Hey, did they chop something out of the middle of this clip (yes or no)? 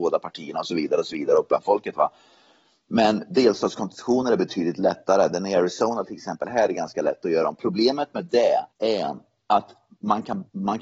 yes